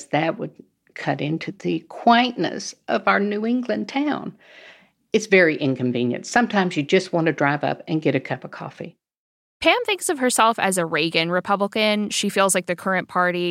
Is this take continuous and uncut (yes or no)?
yes